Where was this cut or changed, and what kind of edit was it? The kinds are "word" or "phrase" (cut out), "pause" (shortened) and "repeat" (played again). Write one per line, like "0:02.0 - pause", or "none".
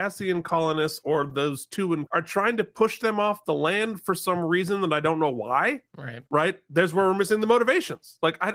0:02.1 - word
0:06.3 - pause